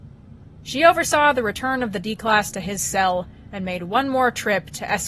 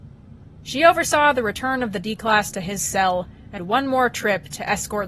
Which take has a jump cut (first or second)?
second